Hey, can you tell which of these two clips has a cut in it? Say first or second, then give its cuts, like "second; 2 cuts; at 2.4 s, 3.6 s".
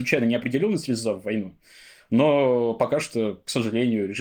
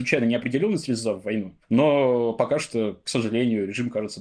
second; 1 cut; at 1.6 s